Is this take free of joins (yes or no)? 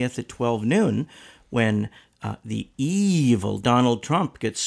yes